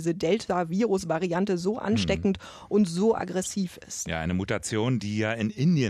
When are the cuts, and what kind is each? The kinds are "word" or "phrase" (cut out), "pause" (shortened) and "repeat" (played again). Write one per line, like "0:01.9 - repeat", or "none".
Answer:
none